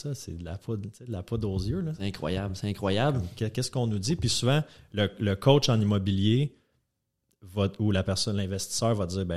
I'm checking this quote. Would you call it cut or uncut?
uncut